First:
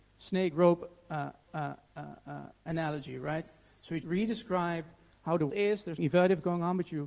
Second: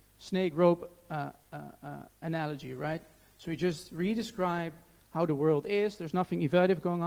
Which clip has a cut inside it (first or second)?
first